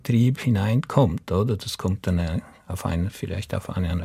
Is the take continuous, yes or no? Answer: yes